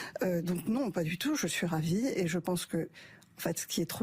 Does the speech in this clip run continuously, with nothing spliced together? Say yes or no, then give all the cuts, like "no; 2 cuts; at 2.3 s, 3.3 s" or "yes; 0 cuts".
yes; 0 cuts